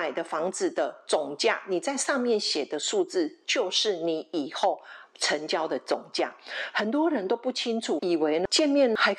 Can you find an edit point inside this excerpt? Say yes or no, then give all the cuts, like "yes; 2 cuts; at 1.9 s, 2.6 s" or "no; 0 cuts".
yes; 1 cut; at 8.0 s